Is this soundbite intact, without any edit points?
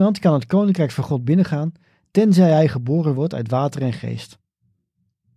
yes; 0 cuts

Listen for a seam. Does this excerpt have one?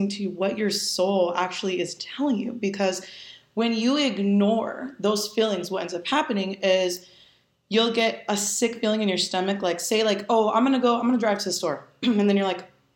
no; 0 cuts

